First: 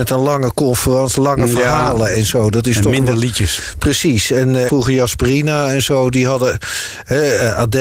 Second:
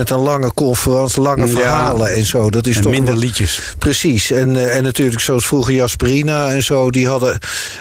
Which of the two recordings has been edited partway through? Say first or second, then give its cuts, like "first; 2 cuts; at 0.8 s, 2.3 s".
first; 1 cut; at 4.7 s